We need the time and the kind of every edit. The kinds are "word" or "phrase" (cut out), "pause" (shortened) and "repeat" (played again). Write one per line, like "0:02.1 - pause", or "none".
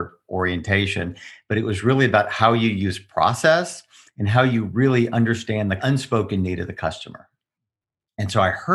none